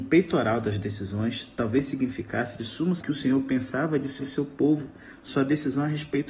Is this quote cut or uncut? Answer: cut